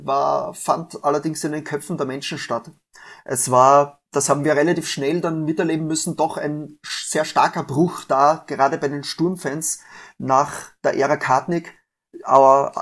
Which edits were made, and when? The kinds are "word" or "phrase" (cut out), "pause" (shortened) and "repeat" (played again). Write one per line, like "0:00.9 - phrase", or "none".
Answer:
0:04.1 - pause